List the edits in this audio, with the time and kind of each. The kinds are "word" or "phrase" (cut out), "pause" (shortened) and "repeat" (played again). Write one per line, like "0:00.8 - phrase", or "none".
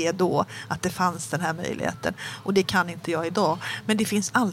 none